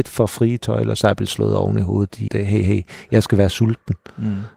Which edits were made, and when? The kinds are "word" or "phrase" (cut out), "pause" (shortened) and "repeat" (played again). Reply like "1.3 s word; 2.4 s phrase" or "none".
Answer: 2.3 s word